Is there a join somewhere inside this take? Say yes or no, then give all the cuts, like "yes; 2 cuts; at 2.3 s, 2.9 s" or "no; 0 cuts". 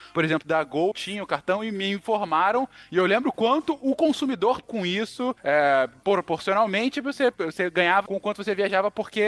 yes; 4 cuts; at 0.9 s, 4.6 s, 5.4 s, 8.1 s